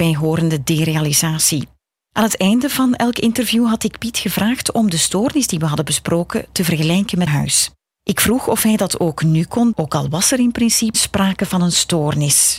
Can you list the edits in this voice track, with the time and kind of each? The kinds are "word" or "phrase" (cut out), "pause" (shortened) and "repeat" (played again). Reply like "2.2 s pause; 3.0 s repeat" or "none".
7.3 s word; 9.7 s word; 10.9 s word